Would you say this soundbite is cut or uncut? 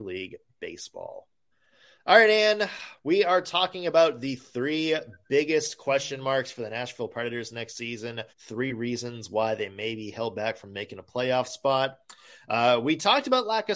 cut